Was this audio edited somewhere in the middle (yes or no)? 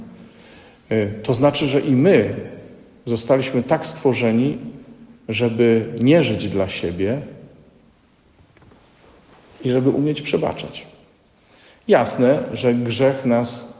no